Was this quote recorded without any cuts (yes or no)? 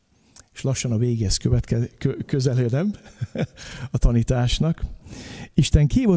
yes